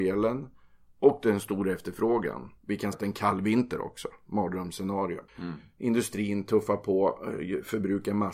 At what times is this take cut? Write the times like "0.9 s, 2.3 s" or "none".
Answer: 2.6 s, 2.9 s, 5.3 s